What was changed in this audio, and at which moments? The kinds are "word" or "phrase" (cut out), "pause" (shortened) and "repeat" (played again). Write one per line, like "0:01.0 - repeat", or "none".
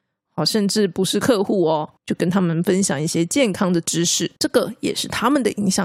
0:02.0 - pause
0:04.4 - pause